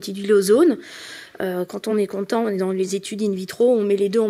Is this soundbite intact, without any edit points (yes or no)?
yes